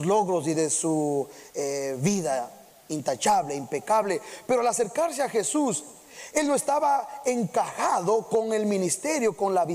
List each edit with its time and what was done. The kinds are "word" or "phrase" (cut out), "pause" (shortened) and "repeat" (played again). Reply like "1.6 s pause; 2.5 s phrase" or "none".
none